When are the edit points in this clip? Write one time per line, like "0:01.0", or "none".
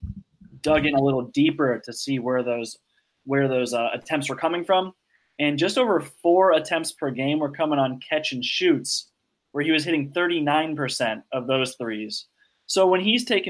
none